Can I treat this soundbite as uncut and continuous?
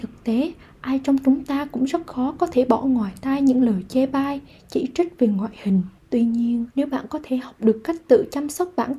no; 2 cuts; at 6.0 s, 6.7 s

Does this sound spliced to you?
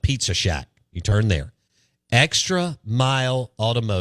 no; 0 cuts

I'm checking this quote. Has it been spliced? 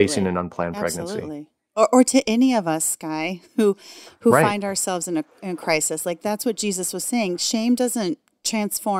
no; 0 cuts

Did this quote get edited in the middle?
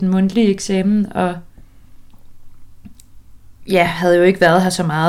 yes; 1 cut; at 3.6 s

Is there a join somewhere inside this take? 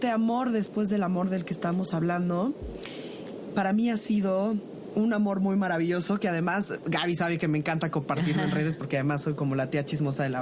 no; 0 cuts

